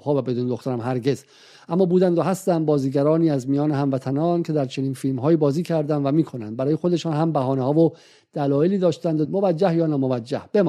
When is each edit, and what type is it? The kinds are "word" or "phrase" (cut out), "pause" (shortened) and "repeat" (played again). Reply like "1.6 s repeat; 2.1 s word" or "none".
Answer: 9.2 s word

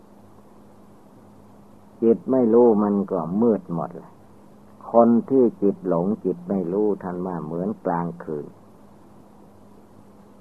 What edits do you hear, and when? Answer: 4.6 s pause

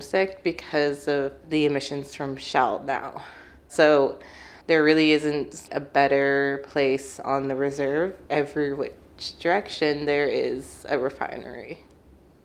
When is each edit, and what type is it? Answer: 4.6 s pause; 8.3 s pause

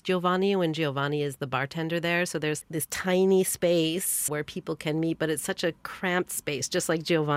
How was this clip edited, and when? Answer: 2.6 s word; 4.3 s word

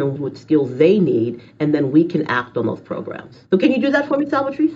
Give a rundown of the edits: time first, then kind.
3.5 s pause

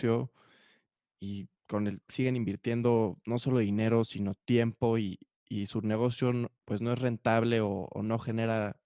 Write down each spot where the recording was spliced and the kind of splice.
6.6 s pause

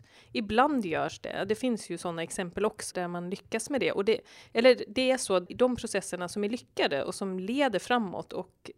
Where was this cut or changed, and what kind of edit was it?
2.9 s word

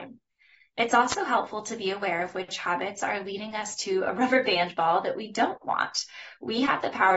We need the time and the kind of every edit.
none

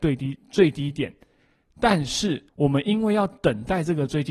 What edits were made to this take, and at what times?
2.5 s pause

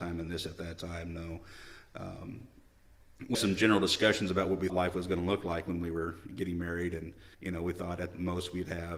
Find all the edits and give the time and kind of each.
3.3 s word; 4.7 s word; 6.3 s word; 7.3 s pause

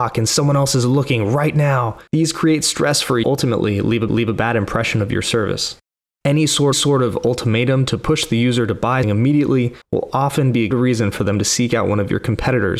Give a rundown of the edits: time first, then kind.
2.1 s pause; 3.2 s phrase; 4.1 s repeat; 6.7 s repeat; 9.0 s word; 9.8 s pause; 10.7 s word

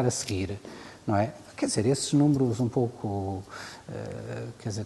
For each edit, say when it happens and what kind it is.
none

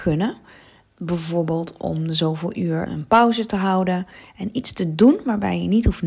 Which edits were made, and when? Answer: 2.9 s word

